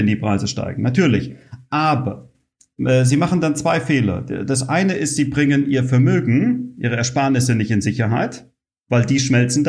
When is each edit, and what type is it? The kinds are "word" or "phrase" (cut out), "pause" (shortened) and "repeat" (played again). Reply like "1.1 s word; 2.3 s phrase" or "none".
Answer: none